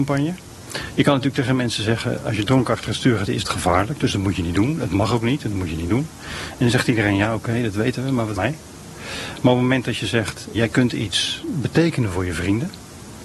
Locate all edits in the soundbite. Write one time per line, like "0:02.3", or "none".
0:03.3
0:08.4
0:10.5